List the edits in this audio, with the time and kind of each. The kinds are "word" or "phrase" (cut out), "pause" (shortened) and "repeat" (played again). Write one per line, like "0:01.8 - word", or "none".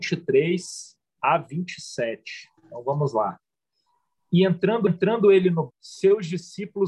0:01.0 - pause
0:02.6 - pause
0:04.9 - repeat
0:05.7 - word